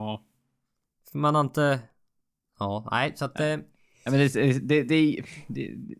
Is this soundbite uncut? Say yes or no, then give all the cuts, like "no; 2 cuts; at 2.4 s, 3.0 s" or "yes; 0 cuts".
yes; 0 cuts